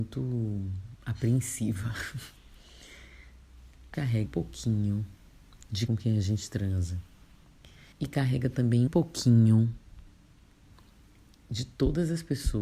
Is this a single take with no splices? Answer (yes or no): no